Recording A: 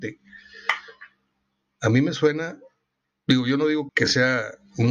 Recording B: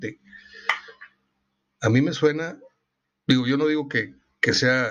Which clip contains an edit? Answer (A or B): A